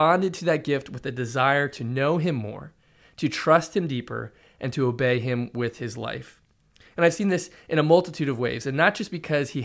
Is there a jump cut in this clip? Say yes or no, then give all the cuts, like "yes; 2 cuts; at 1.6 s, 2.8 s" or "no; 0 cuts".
no; 0 cuts